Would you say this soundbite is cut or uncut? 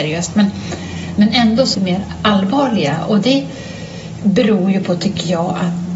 cut